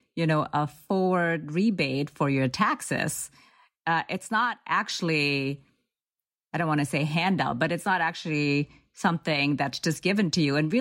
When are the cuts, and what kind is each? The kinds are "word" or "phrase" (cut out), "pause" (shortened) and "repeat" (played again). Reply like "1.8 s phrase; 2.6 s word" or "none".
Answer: none